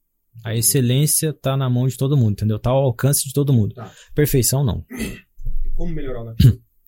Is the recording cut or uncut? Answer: uncut